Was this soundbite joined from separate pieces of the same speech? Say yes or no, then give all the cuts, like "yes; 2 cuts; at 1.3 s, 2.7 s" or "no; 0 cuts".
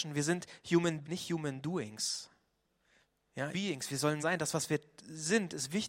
yes; 3 cuts; at 1.0 s, 3.5 s, 4.2 s